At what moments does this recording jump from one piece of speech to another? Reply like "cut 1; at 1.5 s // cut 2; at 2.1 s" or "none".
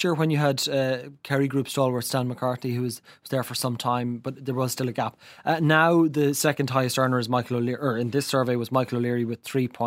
none